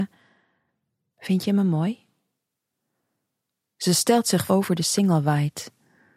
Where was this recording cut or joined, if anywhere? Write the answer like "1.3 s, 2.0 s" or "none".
4.5 s